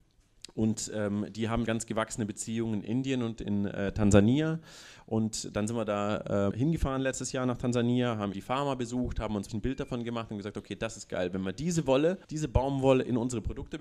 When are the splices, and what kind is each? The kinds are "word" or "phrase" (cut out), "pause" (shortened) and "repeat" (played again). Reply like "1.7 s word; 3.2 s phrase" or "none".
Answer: 1.7 s word; 6.5 s word; 8.3 s word; 9.5 s word; 12.2 s pause